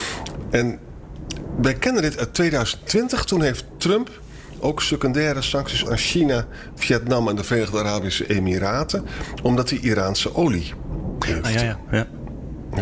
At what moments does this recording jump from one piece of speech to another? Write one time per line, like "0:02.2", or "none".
0:05.8
0:11.4